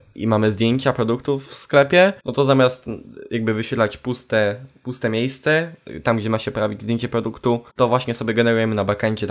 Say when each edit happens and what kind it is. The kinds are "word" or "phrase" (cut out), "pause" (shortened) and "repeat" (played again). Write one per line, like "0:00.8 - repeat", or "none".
0:02.2 - pause
0:07.7 - pause